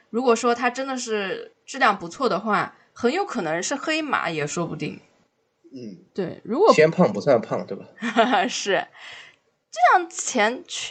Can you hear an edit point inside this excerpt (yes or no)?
no